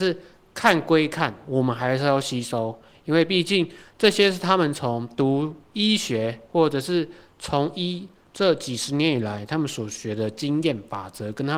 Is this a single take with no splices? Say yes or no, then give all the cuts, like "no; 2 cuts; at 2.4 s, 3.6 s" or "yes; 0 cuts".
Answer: yes; 0 cuts